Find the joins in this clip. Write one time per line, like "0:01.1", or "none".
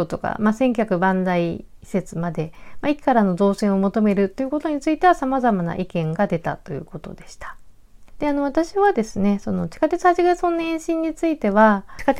none